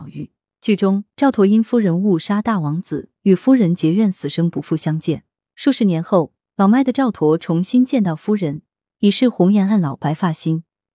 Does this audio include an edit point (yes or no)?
no